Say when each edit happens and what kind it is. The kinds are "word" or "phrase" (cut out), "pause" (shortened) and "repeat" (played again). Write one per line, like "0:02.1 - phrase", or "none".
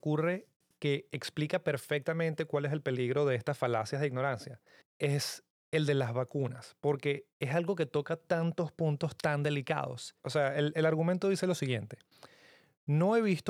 0:04.8 - pause
0:10.2 - pause